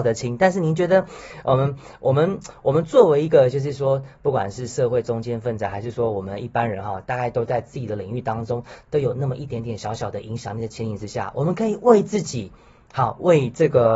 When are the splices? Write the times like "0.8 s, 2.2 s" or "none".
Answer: none

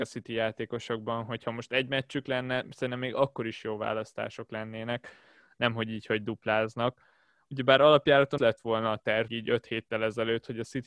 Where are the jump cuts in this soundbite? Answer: 8.4 s, 9.3 s

